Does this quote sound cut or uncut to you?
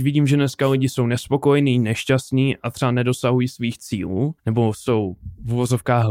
cut